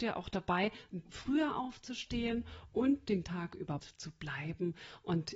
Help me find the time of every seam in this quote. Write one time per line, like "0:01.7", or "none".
0:01.0
0:03.2
0:03.8